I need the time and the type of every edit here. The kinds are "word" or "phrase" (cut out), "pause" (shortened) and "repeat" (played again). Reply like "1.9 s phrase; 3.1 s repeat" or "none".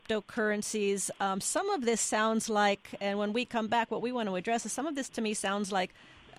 none